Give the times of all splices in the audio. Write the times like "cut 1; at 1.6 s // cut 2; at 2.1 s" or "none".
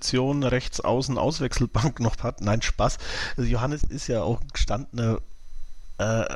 cut 1; at 2.2 s // cut 2; at 3.9 s